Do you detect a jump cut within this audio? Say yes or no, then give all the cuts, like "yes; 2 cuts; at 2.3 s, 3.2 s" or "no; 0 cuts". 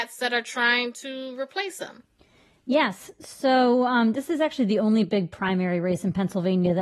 no; 0 cuts